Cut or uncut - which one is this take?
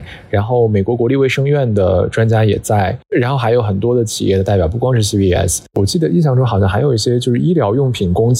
uncut